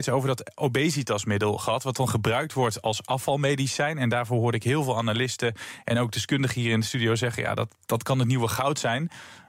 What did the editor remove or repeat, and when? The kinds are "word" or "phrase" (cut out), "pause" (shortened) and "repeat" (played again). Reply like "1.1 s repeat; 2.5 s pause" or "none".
none